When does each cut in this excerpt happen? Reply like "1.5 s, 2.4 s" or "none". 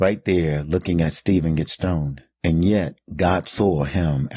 none